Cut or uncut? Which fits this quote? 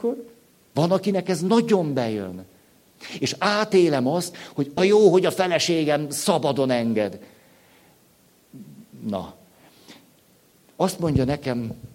cut